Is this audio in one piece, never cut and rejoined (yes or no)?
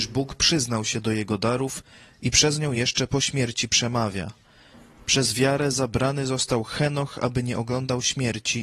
yes